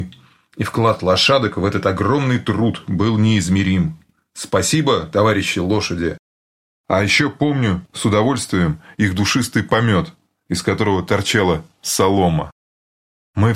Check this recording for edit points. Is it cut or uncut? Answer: uncut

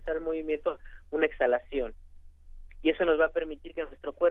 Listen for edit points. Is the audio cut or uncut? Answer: uncut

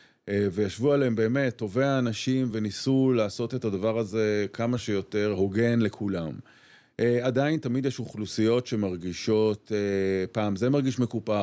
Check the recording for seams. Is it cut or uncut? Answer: uncut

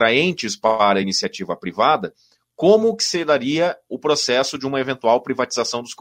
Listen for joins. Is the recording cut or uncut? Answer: uncut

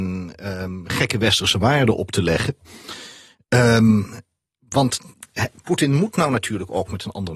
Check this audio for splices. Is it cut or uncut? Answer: uncut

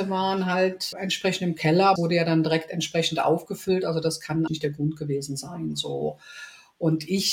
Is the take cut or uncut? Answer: cut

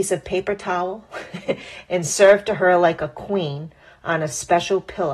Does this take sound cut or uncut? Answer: uncut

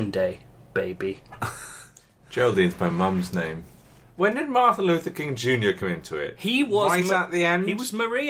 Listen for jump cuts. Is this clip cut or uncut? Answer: uncut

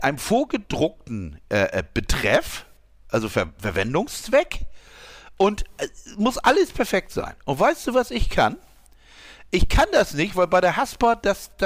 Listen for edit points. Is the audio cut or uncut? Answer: uncut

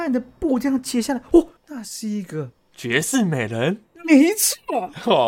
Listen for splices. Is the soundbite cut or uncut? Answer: cut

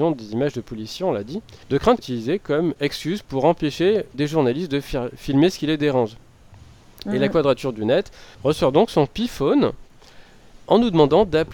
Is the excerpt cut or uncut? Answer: cut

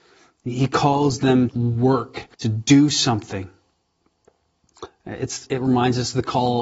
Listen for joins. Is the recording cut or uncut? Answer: cut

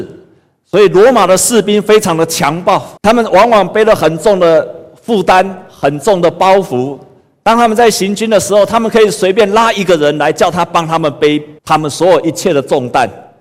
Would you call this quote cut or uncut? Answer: cut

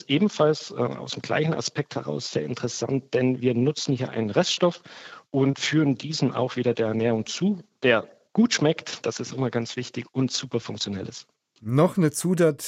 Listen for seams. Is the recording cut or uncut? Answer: uncut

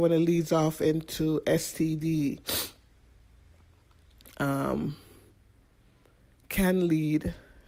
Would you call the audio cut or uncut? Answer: uncut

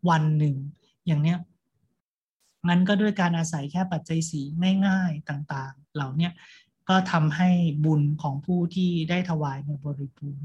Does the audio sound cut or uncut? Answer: uncut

